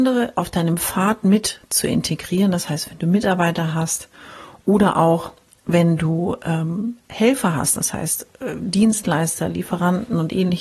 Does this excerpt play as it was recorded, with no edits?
yes; 0 cuts

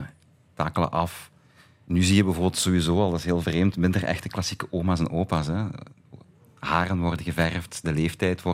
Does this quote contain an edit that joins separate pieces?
no; 0 cuts

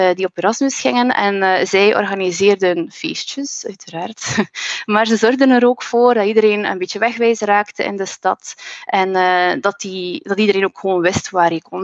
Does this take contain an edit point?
no; 0 cuts

